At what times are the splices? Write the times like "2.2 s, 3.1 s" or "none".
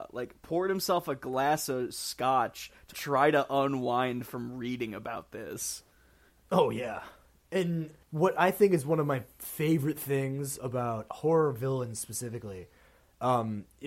2.9 s, 8.0 s, 11.1 s